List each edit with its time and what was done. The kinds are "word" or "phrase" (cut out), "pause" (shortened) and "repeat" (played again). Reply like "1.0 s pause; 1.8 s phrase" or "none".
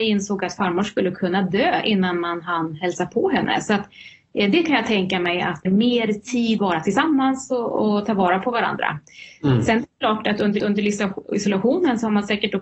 5.6 s phrase; 6.6 s phrase; 10.6 s repeat